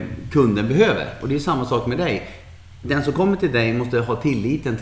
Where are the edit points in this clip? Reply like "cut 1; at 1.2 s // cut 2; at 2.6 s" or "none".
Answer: none